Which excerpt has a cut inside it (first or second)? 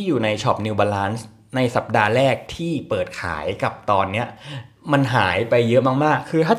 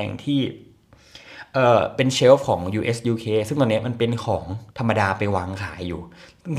second